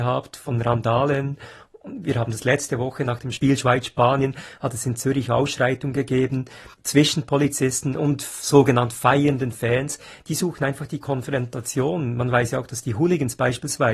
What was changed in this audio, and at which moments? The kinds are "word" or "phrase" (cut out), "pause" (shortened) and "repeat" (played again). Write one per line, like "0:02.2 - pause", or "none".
0:06.7 - pause
0:08.0 - word